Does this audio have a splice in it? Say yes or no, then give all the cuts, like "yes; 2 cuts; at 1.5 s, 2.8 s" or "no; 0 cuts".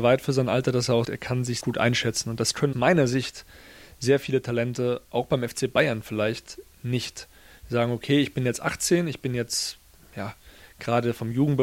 yes; 3 cuts; at 1.0 s, 1.6 s, 2.7 s